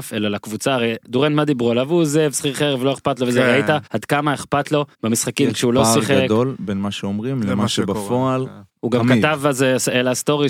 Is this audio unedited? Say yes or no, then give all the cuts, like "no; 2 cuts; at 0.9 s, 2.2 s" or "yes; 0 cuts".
no; 3 cuts; at 3.9 s, 4.9 s, 8.7 s